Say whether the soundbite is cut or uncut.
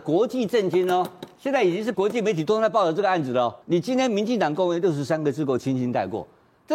cut